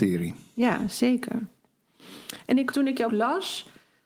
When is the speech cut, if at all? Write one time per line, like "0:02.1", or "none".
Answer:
0:02.7
0:03.1

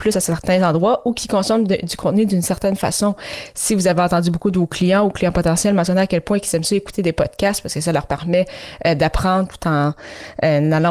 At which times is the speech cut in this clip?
none

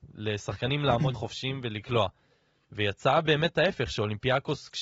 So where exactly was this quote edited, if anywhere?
0:01.1

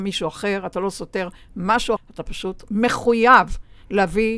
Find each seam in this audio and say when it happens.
0:02.0

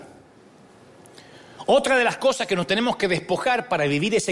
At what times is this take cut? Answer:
none

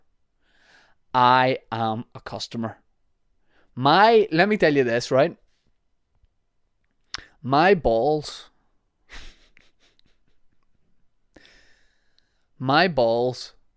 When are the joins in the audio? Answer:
none

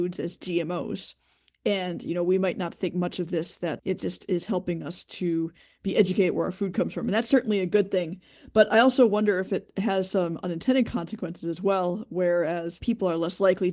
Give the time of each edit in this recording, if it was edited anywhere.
none

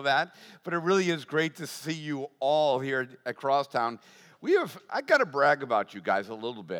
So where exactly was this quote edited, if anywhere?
none

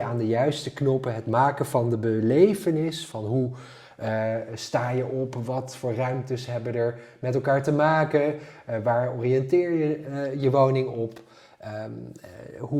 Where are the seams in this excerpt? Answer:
none

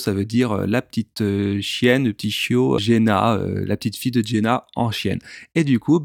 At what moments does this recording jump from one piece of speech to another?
0:02.8

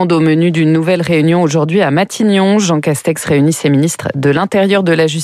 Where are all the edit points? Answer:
none

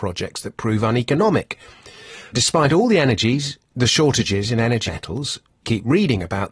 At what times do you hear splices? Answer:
0:02.3
0:04.9
0:05.6

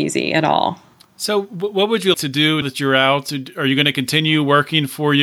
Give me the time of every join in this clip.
0:00.9
0:02.1
0:02.6

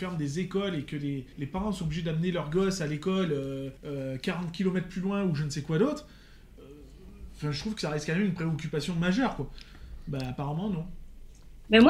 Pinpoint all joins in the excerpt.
0:01.3
0:03.8

